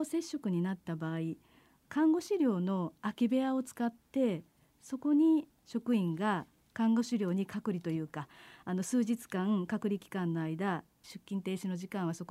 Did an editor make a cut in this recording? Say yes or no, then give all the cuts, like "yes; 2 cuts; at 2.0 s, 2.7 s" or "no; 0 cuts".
no; 0 cuts